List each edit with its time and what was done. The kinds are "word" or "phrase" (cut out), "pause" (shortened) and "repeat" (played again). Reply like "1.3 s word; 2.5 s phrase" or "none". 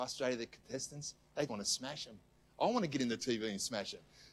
1.5 s word